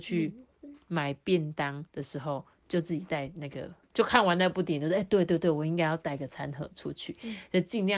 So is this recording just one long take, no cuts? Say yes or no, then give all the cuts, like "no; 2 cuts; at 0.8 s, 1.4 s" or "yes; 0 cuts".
no; 1 cut; at 1.9 s